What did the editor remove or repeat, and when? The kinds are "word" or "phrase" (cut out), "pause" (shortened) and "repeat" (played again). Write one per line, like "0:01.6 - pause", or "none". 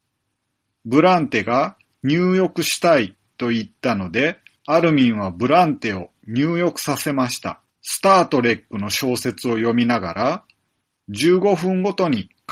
0:04.6 - pause
0:07.7 - pause